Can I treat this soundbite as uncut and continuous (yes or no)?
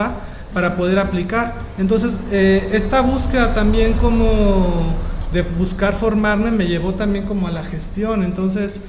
yes